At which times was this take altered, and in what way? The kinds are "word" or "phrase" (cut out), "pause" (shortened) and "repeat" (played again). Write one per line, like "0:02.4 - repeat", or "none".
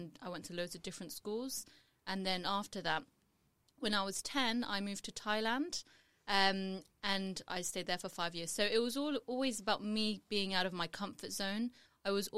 none